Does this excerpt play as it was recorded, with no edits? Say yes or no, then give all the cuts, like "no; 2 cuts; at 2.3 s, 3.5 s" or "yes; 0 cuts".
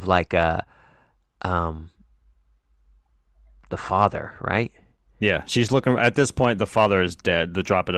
yes; 0 cuts